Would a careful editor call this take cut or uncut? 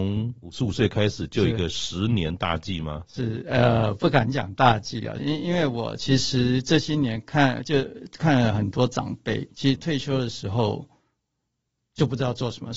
cut